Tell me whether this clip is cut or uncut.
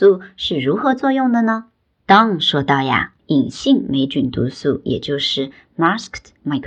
uncut